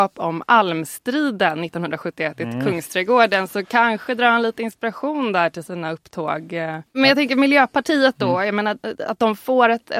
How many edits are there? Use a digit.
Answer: 0